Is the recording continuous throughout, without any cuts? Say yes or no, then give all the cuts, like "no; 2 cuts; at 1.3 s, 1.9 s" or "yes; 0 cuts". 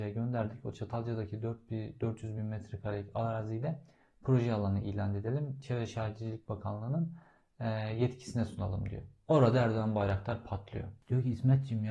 yes; 0 cuts